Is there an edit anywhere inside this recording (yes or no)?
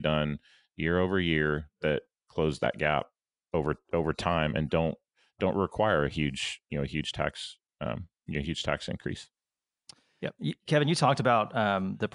no